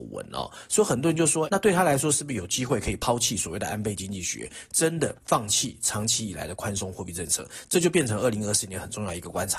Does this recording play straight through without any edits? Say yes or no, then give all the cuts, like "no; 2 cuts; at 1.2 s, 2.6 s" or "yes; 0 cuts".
no; 1 cut; at 1.5 s